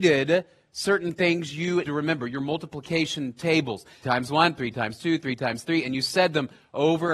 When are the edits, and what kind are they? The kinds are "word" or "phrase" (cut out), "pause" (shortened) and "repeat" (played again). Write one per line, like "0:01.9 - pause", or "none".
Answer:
0:01.8 - word
0:04.0 - word